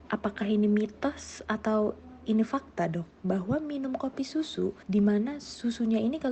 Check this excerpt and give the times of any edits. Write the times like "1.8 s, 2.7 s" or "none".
4.8 s